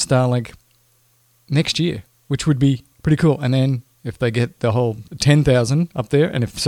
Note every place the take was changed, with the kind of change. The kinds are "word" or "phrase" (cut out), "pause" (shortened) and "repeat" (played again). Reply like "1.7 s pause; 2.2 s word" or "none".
2.9 s pause; 5.1 s pause